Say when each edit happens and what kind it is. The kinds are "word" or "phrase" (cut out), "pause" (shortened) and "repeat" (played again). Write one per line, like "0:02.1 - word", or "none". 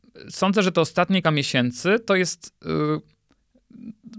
0:01.2 - word